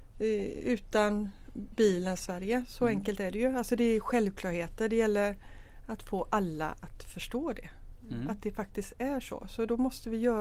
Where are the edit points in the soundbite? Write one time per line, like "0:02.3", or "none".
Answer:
0:02.2